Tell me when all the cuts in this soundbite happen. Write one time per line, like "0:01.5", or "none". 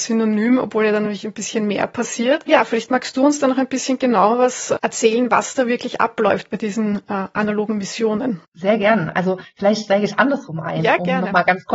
none